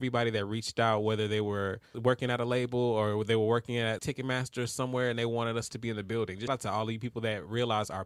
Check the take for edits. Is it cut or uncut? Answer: cut